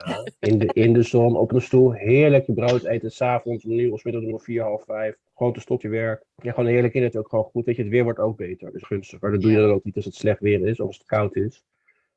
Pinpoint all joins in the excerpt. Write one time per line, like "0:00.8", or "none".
0:04.3
0:05.3
0:05.8
0:06.3
0:07.1
0:08.8
0:09.8